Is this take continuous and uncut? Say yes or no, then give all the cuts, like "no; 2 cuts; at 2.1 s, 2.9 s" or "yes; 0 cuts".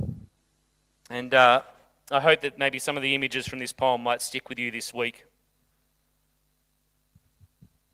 yes; 0 cuts